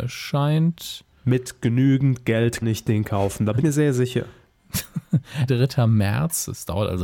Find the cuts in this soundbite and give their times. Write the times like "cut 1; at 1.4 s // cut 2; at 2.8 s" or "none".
cut 1; at 2.6 s // cut 2; at 3.6 s // cut 3; at 5.5 s